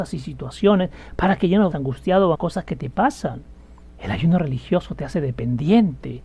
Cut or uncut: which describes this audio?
cut